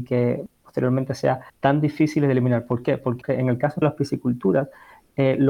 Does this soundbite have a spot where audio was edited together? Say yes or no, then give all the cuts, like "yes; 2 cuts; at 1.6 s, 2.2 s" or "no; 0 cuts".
yes; 3 cuts; at 1.5 s, 3.2 s, 3.8 s